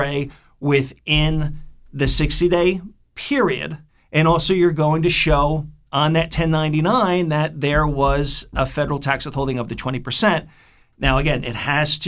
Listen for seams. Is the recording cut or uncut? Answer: cut